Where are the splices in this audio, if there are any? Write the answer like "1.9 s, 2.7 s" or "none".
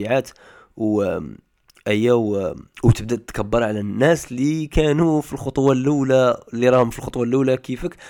2.7 s